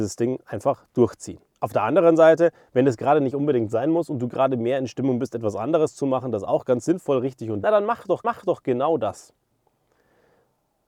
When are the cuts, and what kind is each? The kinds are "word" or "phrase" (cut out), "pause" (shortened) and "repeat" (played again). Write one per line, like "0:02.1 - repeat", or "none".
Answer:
0:01.6 - pause
0:07.6 - phrase
0:08.2 - repeat